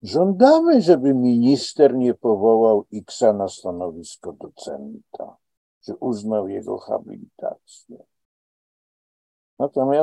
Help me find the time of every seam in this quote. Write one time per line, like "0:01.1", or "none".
none